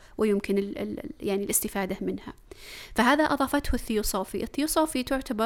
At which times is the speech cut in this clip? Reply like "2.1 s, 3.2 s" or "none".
none